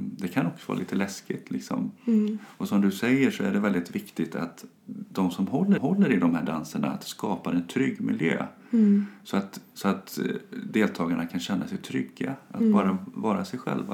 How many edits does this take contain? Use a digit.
2